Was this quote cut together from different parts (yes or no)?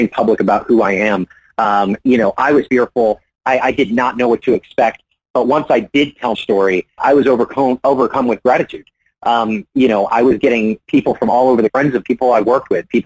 yes